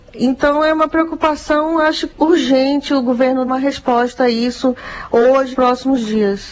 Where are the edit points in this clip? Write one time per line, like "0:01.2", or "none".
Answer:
0:02.1
0:03.5
0:05.5

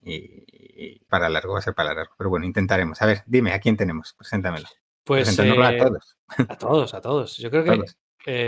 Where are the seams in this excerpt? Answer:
0:01.1

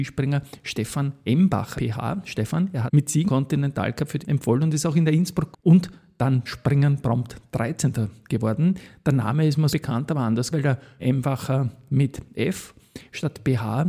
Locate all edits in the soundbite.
0:01.8
0:02.9
0:03.3
0:04.2
0:05.5
0:06.5
0:09.7
0:10.5
0:11.0

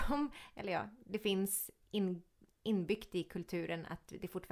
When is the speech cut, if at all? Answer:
none

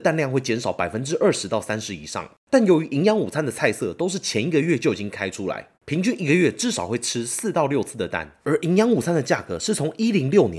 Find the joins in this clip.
0:05.7
0:08.4

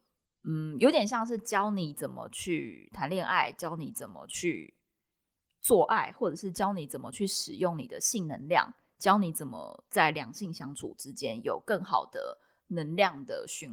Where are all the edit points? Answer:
none

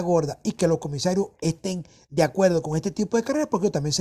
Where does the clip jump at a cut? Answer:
none

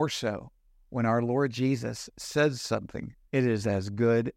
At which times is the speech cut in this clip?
0:03.2

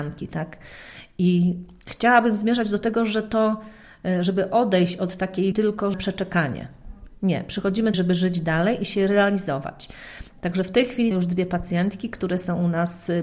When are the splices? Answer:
0:05.5
0:05.9
0:07.9
0:11.1

